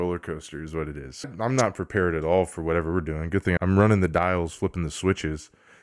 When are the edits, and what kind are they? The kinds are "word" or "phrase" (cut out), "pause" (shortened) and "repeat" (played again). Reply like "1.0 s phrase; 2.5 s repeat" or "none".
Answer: 1.2 s word; 3.6 s word